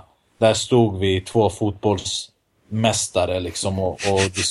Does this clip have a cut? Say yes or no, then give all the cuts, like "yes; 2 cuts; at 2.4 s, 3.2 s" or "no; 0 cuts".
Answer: no; 0 cuts